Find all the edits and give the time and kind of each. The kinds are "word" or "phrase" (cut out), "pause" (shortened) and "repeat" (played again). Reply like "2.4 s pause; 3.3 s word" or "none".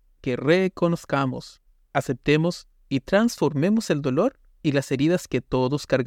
none